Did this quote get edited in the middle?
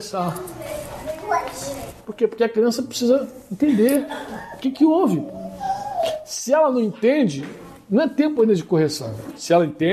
no; 0 cuts

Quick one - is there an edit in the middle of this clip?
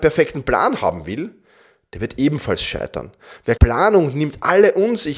yes; 1 cut; at 3.6 s

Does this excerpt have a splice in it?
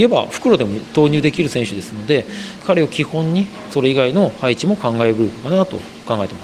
yes; 1 cut; at 3.7 s

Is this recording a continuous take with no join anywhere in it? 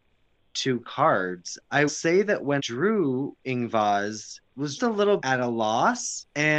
no; 5 cuts; at 1.9 s, 2.6 s, 4.5 s, 4.8 s, 5.2 s

